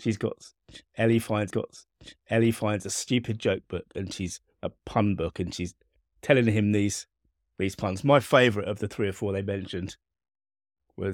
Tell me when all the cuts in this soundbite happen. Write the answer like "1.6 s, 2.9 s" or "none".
1.5 s